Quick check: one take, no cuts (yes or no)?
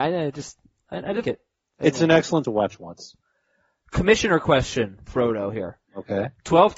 no